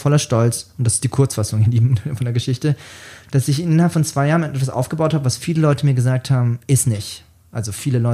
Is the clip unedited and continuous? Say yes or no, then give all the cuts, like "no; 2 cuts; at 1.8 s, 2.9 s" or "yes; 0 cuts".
yes; 0 cuts